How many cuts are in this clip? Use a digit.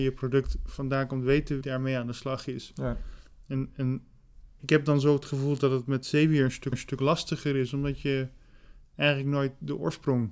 3